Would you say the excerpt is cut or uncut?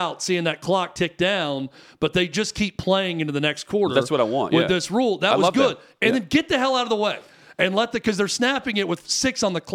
uncut